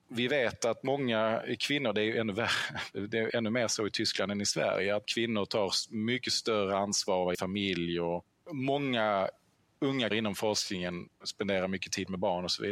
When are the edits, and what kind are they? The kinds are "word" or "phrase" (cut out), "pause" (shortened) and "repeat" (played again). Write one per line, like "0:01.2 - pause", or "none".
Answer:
0:03.3 - word
0:05.0 - word
0:07.3 - word
0:10.1 - word